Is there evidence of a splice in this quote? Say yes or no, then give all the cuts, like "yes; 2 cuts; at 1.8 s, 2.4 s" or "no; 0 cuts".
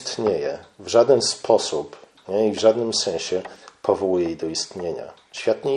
no; 0 cuts